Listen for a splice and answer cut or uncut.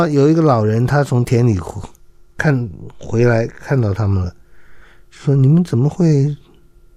uncut